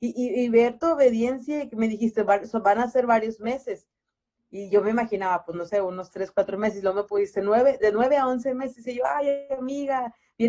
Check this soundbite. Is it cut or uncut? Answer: uncut